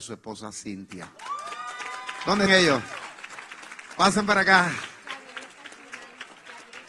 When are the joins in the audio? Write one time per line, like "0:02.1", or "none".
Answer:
0:02.5